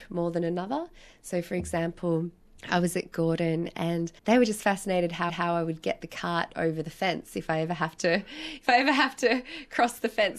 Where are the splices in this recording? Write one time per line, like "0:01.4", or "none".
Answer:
0:04.2
0:05.3